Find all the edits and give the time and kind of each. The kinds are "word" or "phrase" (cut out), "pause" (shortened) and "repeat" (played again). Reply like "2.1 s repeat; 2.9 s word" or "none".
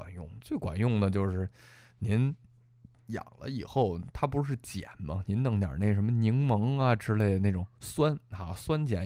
none